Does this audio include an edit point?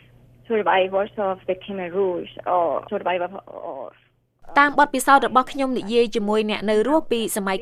yes; 1 cut; at 2.9 s

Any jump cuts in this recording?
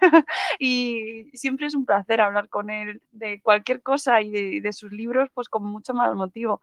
yes; 1 cut; at 3.0 s

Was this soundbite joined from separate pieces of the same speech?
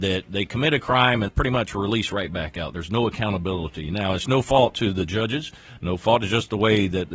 yes; 1 cut; at 1.3 s

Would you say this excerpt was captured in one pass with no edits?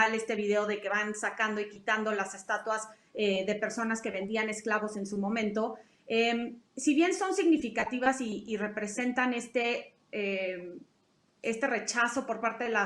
yes; 0 cuts

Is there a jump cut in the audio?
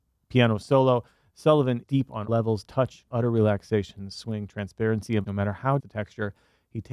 yes; 5 cuts; at 1.8 s, 2.3 s, 3.1 s, 5.2 s, 5.8 s

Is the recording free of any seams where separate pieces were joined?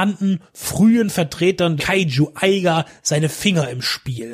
no; 1 cut; at 1.8 s

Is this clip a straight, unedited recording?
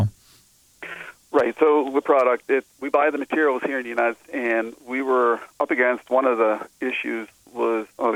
no; 3 cuts; at 2.0 s, 2.7 s, 4.2 s

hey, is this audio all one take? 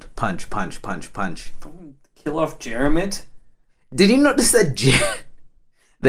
yes; 0 cuts

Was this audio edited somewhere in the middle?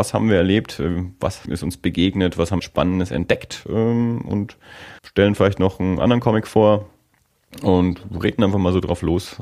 yes; 3 cuts; at 1.4 s, 2.6 s, 5.0 s

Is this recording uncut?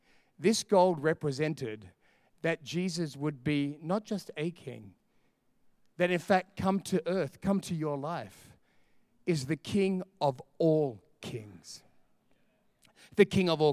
yes; 0 cuts

